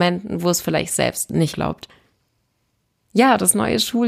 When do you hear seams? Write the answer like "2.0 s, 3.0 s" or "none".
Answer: 1.5 s